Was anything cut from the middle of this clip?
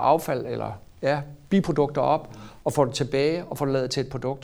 no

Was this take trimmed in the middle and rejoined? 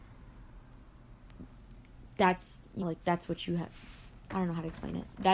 yes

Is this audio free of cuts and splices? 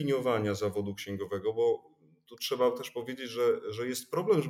yes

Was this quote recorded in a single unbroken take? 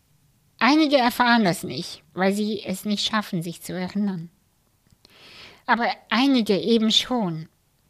no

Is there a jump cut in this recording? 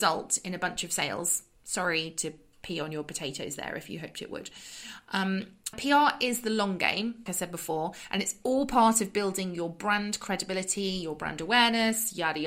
yes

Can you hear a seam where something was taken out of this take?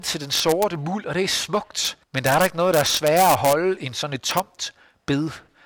yes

